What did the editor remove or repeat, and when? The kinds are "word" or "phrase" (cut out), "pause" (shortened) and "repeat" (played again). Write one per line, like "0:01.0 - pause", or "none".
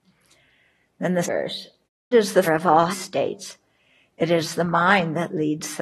0:01.2 - word
0:02.1 - word
0:02.5 - word
0:02.9 - word